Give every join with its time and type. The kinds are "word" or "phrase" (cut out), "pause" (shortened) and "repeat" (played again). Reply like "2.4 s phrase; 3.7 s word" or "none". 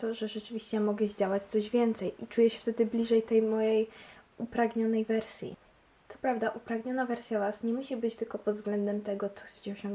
none